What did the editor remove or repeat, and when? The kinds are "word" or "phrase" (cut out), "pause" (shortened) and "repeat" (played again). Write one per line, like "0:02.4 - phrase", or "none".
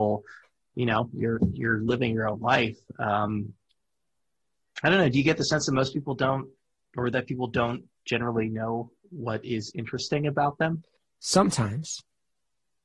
none